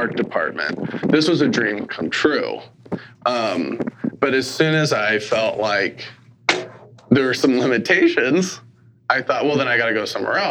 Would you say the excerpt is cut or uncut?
uncut